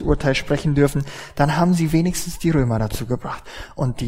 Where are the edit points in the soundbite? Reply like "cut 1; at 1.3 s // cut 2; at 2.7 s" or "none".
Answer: none